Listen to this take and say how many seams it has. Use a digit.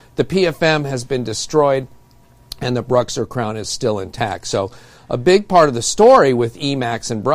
0